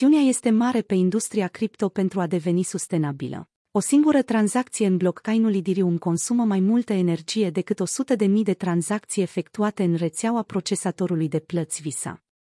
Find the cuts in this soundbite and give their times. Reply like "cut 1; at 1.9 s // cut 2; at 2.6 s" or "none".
cut 1; at 3.6 s